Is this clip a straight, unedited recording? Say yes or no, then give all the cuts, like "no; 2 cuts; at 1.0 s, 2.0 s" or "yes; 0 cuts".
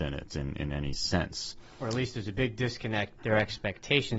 no; 1 cut; at 3.2 s